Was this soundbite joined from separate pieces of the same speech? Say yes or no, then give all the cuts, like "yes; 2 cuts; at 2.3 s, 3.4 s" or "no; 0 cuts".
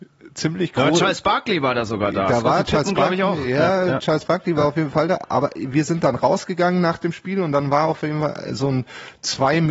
no; 0 cuts